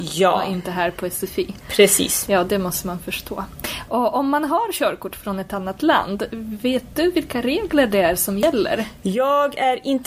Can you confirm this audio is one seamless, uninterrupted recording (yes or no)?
yes